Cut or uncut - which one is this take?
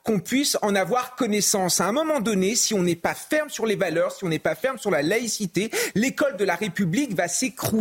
uncut